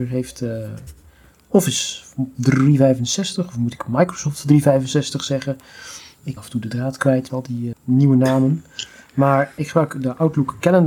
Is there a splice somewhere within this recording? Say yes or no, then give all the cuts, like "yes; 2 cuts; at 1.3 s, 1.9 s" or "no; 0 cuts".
yes; 4 cuts; at 6.4 s, 7.3 s, 7.7 s, 9.6 s